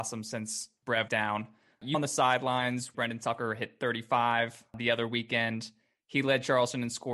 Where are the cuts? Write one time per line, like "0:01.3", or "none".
0:01.1
0:01.9
0:02.9